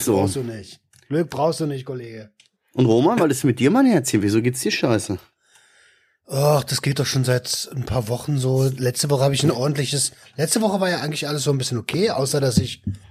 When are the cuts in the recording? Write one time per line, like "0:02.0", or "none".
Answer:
none